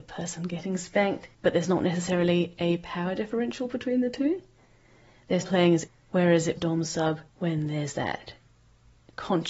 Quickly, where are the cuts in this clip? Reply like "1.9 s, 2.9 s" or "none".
1.3 s, 5.4 s, 5.9 s, 6.6 s, 7.3 s

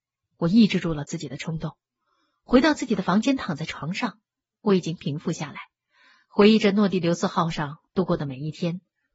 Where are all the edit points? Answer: none

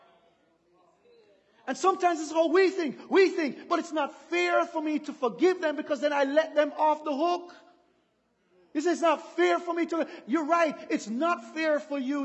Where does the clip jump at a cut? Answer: none

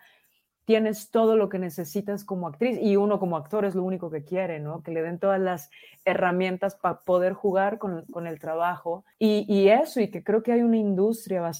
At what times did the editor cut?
9.1 s

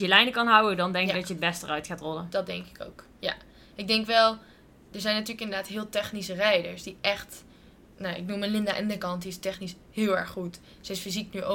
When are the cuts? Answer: none

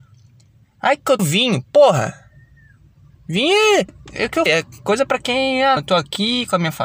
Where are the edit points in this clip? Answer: 1.2 s, 3.9 s, 4.5 s, 5.8 s

